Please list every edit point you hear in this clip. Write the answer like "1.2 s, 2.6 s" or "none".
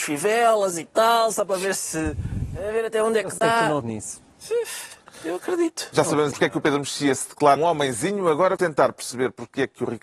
3.8 s, 6.3 s, 7.6 s, 8.6 s